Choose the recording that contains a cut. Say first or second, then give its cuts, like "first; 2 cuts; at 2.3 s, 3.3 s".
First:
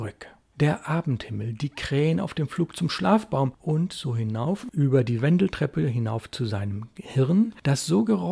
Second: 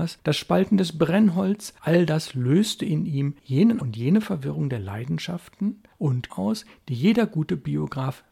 second; 2 cuts; at 3.8 s, 6.3 s